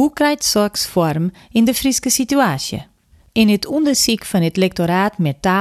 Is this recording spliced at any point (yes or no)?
no